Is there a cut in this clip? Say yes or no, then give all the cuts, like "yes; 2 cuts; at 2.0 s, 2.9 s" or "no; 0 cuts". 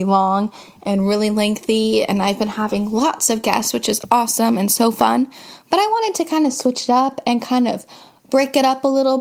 no; 0 cuts